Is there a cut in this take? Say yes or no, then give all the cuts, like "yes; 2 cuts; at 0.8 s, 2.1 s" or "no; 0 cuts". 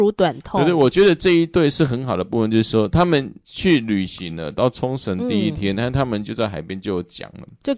yes; 1 cut; at 3.4 s